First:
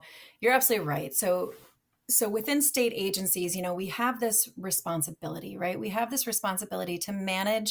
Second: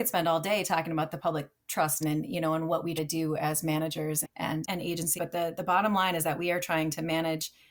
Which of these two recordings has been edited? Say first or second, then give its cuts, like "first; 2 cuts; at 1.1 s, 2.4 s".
second; 5 cuts; at 2.0 s, 3.0 s, 4.2 s, 4.6 s, 5.2 s